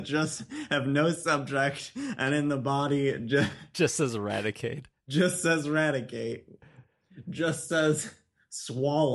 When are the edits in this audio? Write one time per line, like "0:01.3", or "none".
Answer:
none